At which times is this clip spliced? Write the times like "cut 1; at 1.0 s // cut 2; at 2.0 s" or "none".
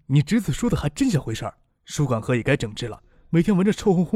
none